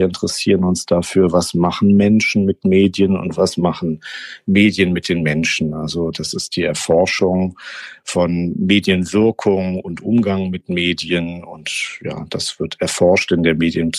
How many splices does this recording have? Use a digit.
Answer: 0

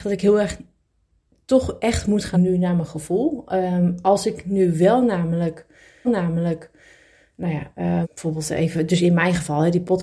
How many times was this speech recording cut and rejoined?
3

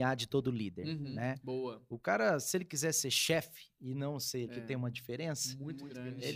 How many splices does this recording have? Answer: 1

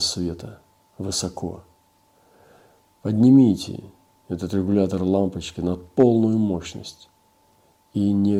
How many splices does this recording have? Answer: 0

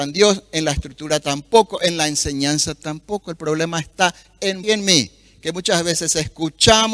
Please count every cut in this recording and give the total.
1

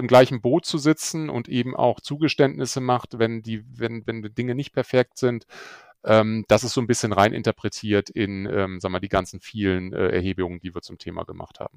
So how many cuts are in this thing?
0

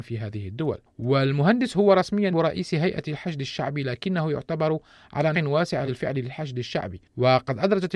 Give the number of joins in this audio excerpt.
3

